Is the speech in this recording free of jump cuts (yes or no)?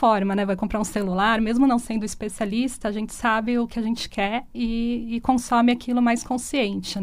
yes